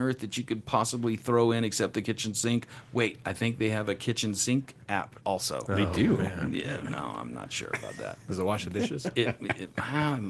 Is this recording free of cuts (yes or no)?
no